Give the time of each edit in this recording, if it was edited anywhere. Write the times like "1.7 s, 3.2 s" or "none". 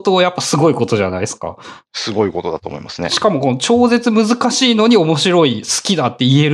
1.8 s